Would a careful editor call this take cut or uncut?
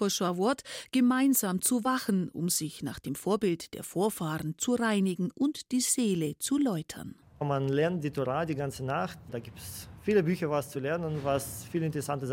uncut